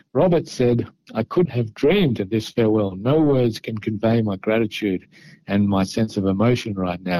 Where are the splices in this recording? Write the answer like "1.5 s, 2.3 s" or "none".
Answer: 1.5 s